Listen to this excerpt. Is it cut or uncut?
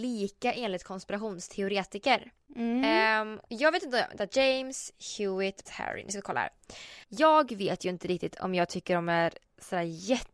cut